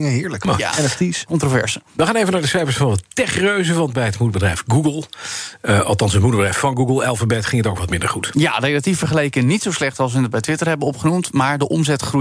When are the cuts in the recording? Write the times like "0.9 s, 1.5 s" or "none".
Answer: none